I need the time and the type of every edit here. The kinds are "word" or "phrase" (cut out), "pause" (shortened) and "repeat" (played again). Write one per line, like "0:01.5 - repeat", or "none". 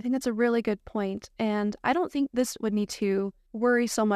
0:02.6 - word